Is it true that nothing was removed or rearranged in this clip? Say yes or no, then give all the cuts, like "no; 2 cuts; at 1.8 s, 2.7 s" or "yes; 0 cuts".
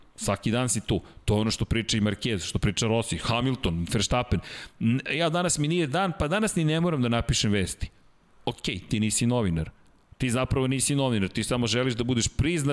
yes; 0 cuts